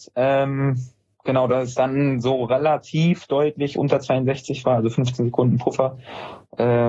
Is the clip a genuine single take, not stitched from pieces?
yes; 0 cuts

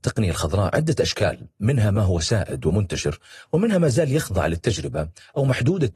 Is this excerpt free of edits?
yes; 0 cuts

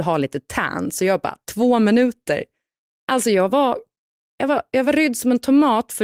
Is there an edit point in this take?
no; 0 cuts

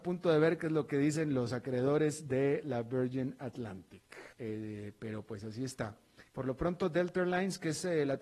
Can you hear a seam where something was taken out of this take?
yes; 2 cuts; at 4.3 s, 6.3 s

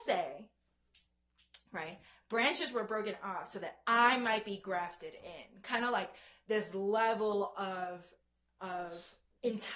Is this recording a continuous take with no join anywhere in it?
yes; 0 cuts

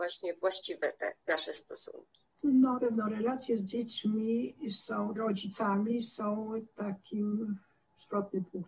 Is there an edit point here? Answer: yes; 3 cuts; at 1.2 s, 2.8 s, 5.2 s

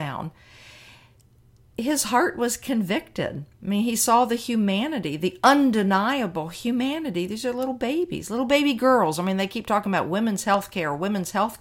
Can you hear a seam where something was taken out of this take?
no; 0 cuts

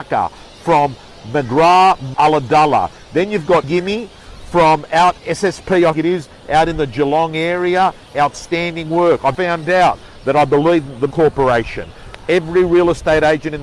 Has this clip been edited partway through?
yes; 6 cuts; at 2.1 s, 3.6 s, 5.2 s, 5.9 s, 9.3 s, 11.1 s

